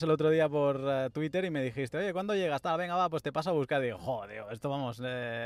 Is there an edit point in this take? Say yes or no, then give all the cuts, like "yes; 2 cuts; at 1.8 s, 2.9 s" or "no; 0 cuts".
no; 0 cuts